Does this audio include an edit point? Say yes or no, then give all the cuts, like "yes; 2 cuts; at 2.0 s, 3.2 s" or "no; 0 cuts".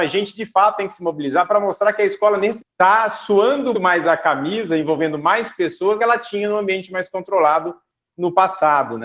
yes; 3 cuts; at 2.6 s, 3.7 s, 6.0 s